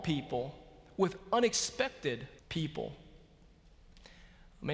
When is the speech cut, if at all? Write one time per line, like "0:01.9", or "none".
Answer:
0:02.4